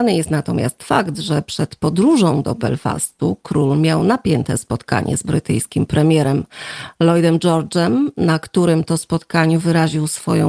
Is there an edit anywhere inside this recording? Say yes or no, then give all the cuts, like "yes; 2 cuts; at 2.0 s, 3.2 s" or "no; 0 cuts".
no; 0 cuts